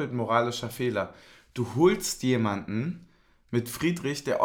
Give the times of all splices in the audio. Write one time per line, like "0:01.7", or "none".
none